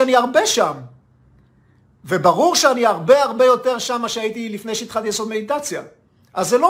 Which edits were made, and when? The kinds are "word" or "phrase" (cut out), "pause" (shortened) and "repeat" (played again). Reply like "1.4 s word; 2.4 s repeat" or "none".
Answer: none

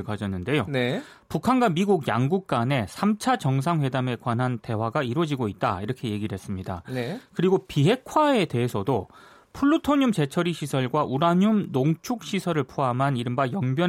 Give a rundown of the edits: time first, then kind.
none

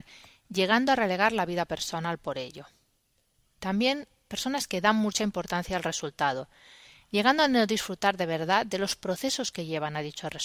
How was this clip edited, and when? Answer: none

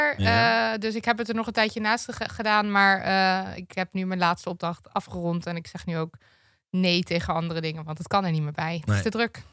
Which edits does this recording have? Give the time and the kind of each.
none

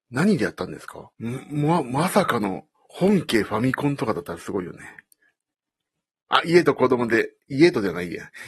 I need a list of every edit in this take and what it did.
1.1 s pause

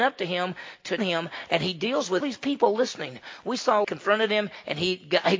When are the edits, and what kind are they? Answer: 1.0 s word; 2.2 s phrase; 3.8 s phrase

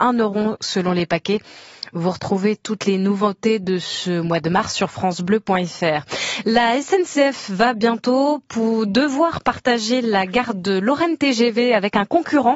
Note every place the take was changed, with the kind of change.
none

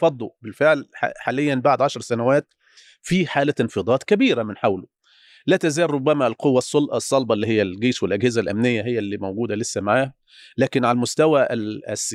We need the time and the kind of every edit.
none

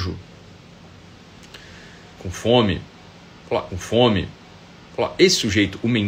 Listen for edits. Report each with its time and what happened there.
2.1 s phrase; 3.7 s repeat

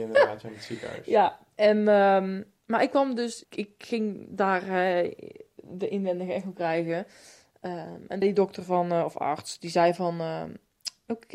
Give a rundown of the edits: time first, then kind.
2.6 s pause; 3.4 s word; 8.2 s word

